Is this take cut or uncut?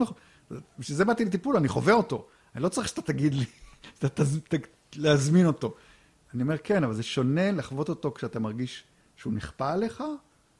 uncut